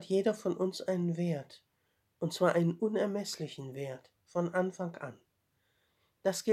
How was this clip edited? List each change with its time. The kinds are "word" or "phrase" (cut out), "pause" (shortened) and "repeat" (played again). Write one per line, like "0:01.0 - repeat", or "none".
none